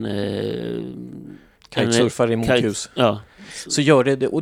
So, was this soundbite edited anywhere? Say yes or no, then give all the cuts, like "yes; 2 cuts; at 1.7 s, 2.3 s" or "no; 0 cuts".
no; 0 cuts